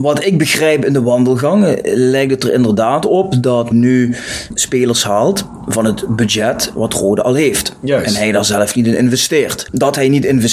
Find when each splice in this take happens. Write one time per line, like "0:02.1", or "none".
0:03.7